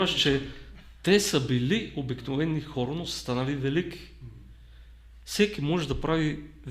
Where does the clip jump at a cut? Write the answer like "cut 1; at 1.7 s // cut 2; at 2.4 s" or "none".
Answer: none